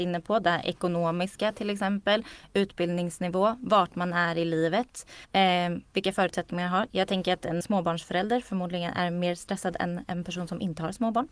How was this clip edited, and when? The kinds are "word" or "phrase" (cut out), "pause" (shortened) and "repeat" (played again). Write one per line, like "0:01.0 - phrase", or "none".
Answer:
0:05.2 - pause
0:07.6 - word